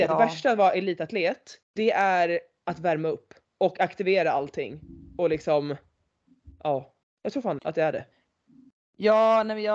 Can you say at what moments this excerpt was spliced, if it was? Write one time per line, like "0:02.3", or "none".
0:01.6
0:03.4
0:07.0
0:07.6